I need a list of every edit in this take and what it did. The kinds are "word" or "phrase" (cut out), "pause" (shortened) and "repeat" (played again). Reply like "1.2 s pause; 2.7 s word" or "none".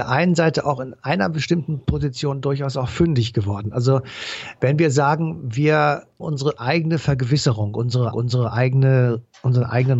1.8 s pause; 6.2 s word; 8.1 s repeat